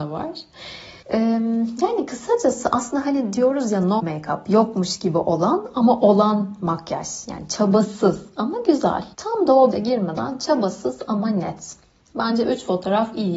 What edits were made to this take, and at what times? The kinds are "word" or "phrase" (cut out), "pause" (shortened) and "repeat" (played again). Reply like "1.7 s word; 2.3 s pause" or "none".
1.0 s pause; 4.0 s word; 9.1 s pause; 9.7 s phrase